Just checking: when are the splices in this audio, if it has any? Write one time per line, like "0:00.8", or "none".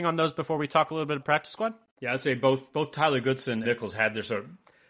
0:01.2
0:03.6